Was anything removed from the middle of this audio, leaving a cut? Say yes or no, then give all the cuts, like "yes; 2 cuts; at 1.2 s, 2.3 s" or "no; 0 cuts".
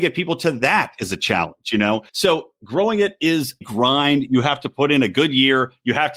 yes; 2 cuts; at 2.1 s, 3.6 s